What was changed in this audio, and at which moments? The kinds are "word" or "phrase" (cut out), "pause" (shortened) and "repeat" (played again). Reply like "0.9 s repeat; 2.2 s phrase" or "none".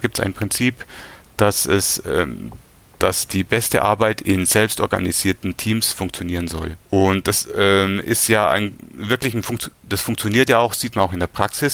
6.8 s pause